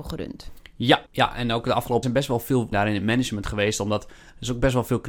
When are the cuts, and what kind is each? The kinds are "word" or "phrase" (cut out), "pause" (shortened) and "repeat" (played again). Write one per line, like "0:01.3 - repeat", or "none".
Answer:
0:01.1 - pause
0:02.0 - word
0:02.7 - word